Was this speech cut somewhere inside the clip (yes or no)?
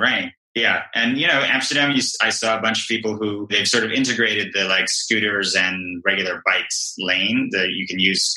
no